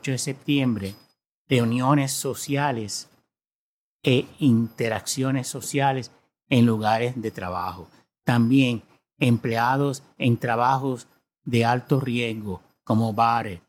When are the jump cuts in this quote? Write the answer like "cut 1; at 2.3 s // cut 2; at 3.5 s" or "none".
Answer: none